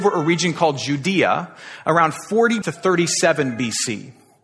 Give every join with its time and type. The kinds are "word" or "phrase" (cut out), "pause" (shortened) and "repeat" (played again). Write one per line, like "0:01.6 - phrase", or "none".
0:02.6 - word